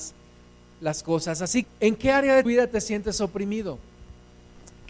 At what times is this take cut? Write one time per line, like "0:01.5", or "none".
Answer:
0:01.6
0:02.4

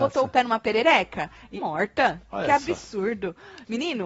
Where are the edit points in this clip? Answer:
0:01.6

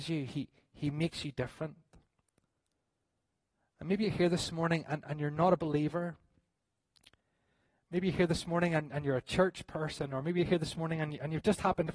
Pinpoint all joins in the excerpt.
none

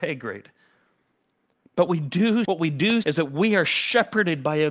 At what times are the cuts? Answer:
0:01.9
0:02.4
0:03.0

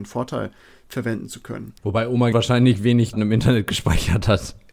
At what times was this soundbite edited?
0:01.8
0:02.3
0:03.1

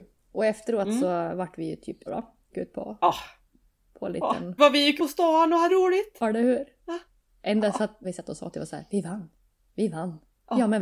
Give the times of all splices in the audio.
0:02.1
0:02.5
0:04.6
0:05.0
0:05.7
0:08.0
0:08.5

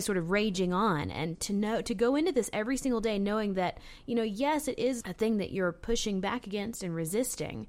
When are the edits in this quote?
0:01.3
0:05.0

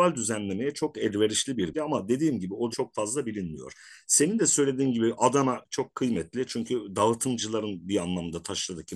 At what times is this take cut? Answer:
0:01.7
0:02.7
0:05.6

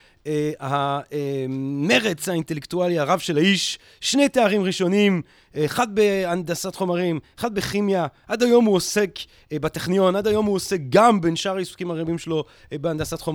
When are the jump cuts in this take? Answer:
none

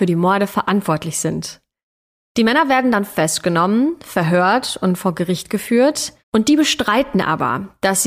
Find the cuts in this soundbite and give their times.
0:06.2

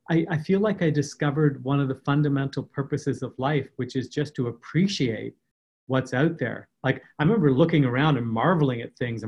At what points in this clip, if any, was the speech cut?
none

